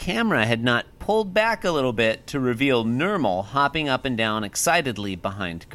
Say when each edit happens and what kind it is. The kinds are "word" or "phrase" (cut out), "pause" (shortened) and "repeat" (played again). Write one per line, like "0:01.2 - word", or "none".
0:00.9 - pause